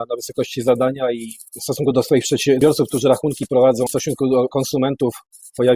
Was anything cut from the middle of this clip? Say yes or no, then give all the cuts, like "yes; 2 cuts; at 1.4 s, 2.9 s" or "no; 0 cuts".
yes; 2 cuts; at 1.5 s, 3.9 s